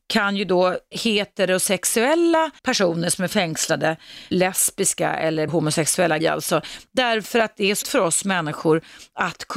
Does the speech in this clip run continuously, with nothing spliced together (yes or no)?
no